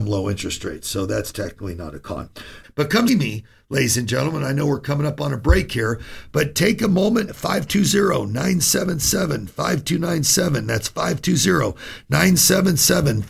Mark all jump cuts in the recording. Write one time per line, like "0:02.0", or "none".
0:03.1
0:07.3

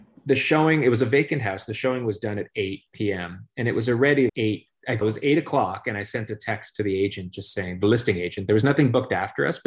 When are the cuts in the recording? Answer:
0:04.3
0:05.0

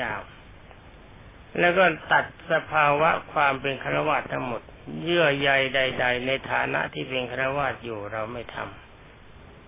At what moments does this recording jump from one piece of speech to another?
0:01.5

